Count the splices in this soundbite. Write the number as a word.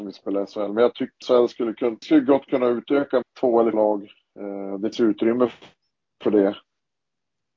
five